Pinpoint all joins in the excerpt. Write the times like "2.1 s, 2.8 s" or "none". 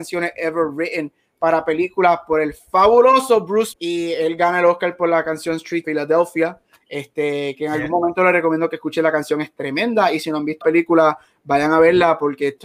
3.7 s, 5.8 s, 10.6 s